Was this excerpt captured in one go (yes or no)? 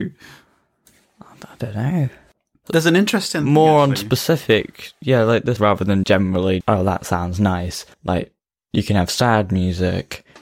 no